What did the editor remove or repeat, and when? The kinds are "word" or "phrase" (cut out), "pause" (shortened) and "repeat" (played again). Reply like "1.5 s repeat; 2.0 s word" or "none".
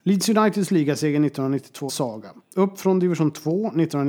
1.9 s phrase